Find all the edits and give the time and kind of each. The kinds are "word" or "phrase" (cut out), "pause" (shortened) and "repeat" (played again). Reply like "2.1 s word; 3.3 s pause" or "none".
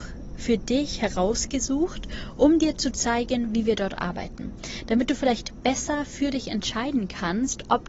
none